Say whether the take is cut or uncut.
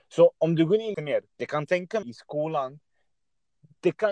cut